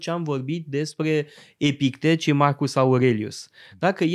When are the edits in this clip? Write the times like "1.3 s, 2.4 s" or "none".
none